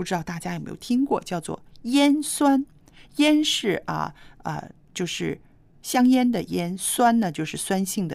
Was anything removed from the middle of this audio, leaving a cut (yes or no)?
no